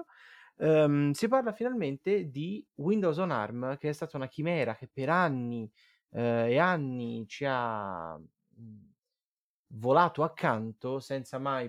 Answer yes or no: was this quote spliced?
no